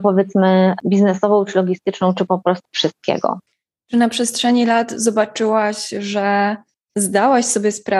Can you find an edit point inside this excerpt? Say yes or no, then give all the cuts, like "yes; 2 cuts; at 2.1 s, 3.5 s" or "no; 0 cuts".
yes; 1 cut; at 2.6 s